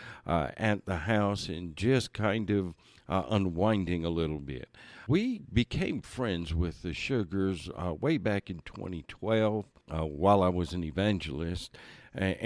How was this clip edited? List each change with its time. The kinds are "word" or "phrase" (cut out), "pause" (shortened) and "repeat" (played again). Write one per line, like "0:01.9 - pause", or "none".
none